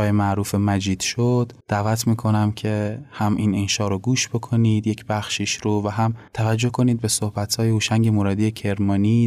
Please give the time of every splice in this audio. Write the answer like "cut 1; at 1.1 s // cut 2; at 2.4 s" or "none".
cut 1; at 1.6 s // cut 2; at 6.3 s